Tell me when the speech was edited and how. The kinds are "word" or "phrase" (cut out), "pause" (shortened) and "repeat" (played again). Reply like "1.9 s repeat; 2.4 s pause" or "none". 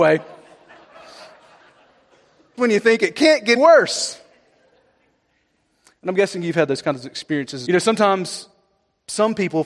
2.6 s word; 3.6 s word; 7.7 s phrase

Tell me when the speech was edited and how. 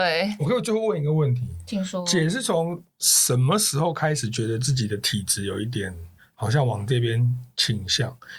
6.2 s pause

